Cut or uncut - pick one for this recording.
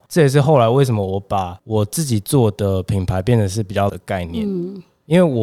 cut